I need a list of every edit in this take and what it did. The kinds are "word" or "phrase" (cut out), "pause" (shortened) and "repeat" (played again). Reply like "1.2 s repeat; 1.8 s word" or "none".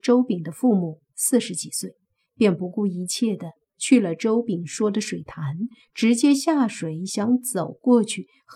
none